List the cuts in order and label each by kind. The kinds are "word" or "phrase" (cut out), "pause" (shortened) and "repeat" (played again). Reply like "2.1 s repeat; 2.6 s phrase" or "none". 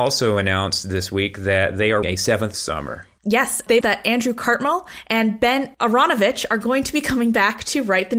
2.0 s word; 2.5 s phrase; 3.8 s word

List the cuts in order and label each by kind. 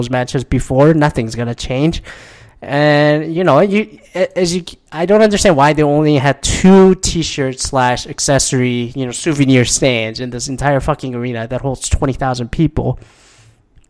none

